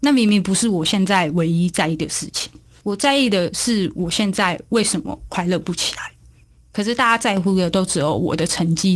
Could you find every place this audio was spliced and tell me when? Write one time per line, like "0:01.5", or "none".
none